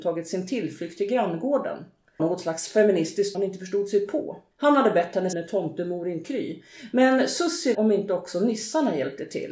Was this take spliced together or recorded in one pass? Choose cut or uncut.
cut